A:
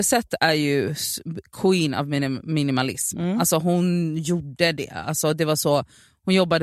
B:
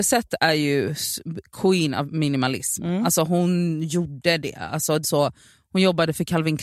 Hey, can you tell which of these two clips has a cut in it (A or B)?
B